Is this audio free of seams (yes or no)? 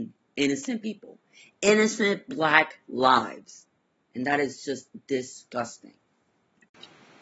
yes